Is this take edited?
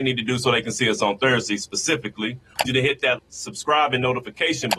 yes; 2 cuts; at 2.7 s, 3.2 s

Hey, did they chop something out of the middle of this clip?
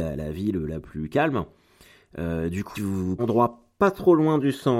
yes; 2 cuts; at 2.7 s, 3.2 s

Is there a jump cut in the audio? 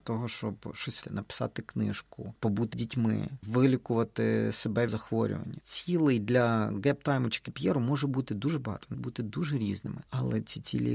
yes; 4 cuts; at 1.0 s, 2.7 s, 4.9 s, 8.9 s

